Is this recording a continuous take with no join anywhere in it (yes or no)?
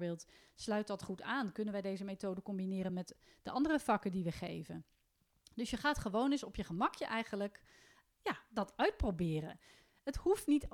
yes